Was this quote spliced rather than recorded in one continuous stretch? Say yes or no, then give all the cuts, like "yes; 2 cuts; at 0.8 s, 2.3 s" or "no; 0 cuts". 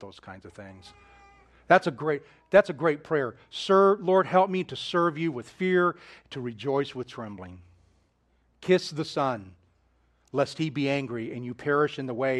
no; 0 cuts